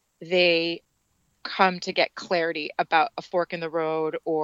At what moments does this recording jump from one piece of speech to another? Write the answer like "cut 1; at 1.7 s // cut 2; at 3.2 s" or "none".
none